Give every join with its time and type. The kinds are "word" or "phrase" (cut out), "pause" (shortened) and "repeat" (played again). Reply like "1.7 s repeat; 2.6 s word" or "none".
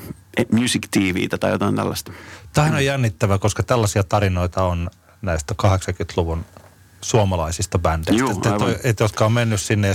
none